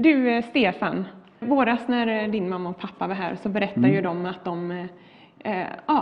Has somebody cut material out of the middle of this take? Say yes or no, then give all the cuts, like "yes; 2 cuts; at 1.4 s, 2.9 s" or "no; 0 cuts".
yes; 1 cut; at 1.4 s